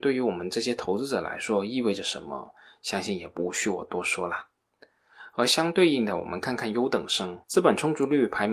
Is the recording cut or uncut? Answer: cut